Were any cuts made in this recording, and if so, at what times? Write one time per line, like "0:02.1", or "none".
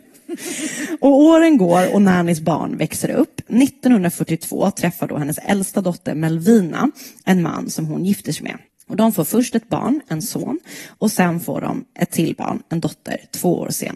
0:08.7